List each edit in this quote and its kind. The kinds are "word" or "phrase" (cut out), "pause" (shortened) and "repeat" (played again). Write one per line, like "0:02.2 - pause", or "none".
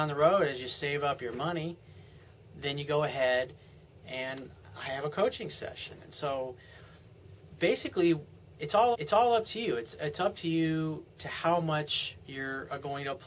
0:08.9 - repeat